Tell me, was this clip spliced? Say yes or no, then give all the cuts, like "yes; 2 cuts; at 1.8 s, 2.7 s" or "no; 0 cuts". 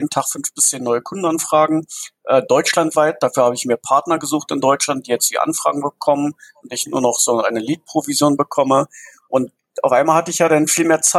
no; 0 cuts